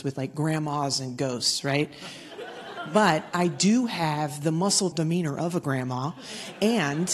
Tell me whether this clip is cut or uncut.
cut